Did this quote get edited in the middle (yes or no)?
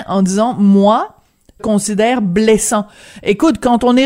yes